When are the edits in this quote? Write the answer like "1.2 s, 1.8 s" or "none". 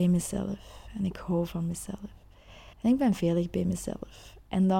2.7 s